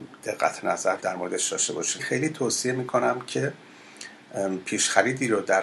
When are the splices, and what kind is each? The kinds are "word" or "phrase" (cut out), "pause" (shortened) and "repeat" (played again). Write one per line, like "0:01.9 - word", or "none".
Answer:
0:01.0 - word
0:02.0 - word